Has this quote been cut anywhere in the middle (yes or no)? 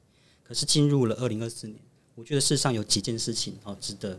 no